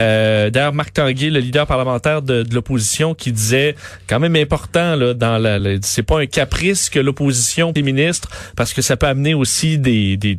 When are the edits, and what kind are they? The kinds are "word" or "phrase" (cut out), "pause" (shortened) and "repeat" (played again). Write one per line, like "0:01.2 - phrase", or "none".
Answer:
0:05.6 - word
0:07.8 - phrase